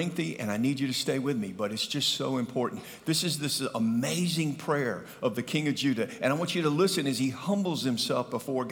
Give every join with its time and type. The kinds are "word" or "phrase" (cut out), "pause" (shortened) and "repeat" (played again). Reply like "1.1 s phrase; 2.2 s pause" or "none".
none